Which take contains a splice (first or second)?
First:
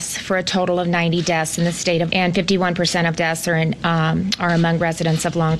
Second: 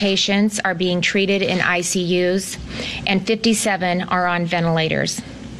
first